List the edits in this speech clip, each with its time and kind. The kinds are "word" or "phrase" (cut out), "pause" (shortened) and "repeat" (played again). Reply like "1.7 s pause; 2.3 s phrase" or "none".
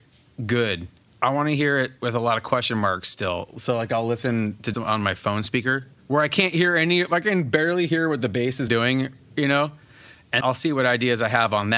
4.7 s word; 8.7 s word; 10.4 s word